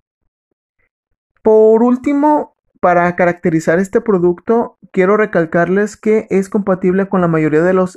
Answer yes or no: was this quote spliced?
yes